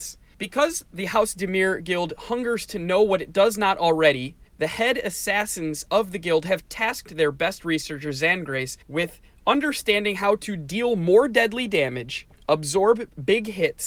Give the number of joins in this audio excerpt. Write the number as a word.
two